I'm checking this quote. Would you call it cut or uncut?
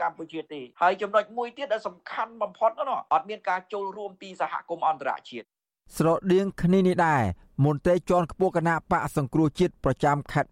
uncut